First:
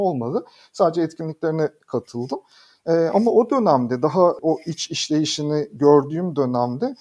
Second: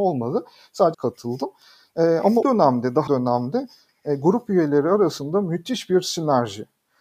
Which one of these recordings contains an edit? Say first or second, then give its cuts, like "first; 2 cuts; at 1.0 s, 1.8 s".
second; 3 cuts; at 0.9 s, 2.4 s, 3.1 s